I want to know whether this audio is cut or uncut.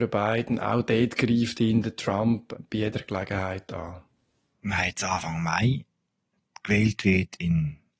uncut